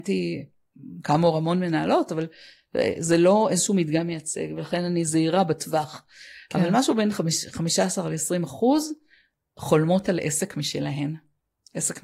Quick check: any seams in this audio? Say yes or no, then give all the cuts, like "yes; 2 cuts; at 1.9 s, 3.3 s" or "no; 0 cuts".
no; 0 cuts